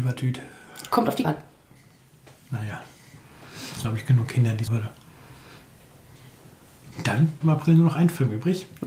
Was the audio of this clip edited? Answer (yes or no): yes